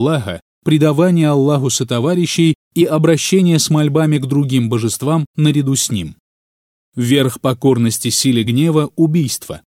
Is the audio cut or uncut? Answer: uncut